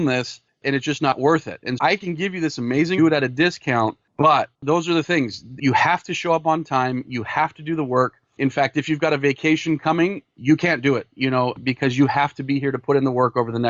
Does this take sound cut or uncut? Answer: cut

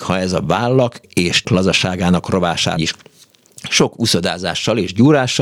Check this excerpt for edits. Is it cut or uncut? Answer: cut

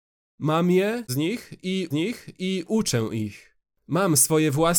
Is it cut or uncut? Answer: cut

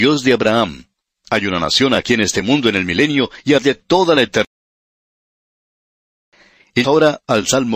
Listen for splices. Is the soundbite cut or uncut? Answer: cut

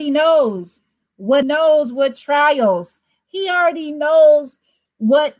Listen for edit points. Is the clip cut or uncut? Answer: cut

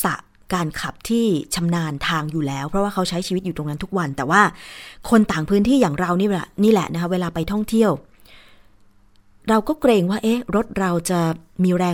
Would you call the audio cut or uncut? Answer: uncut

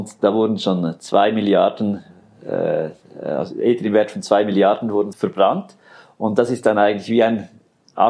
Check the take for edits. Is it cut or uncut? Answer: cut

